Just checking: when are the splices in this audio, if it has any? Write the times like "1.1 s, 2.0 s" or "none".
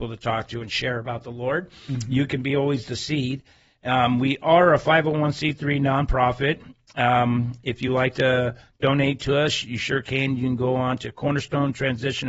none